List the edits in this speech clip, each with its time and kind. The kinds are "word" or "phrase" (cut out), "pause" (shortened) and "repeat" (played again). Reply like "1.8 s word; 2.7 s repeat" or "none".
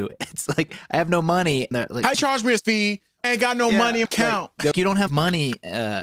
1.7 s word; 2.1 s word; 2.6 s word; 3.2 s word; 4.1 s word; 4.7 s word; 5.1 s word